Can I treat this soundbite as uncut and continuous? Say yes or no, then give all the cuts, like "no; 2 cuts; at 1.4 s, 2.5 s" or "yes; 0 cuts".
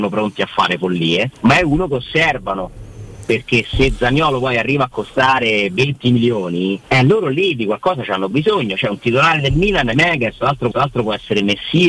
no; 4 cuts; at 1.3 s, 6.8 s, 9.9 s, 10.7 s